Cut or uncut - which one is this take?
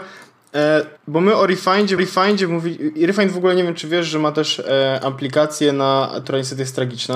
cut